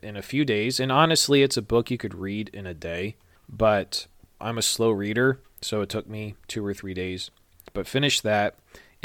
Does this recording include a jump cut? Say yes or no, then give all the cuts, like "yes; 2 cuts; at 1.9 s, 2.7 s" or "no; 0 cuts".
no; 0 cuts